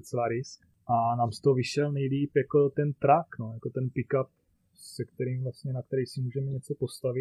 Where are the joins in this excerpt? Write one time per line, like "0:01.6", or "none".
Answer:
none